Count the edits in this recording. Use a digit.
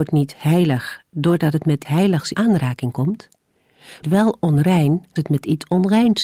4